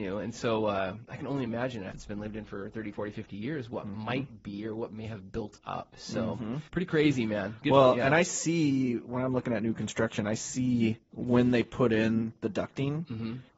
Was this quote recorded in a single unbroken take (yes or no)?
no